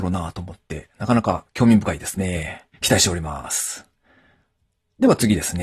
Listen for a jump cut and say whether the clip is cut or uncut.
cut